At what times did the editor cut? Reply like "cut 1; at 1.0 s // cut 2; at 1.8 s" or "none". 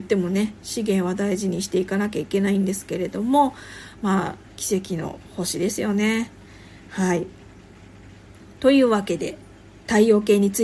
cut 1; at 4.4 s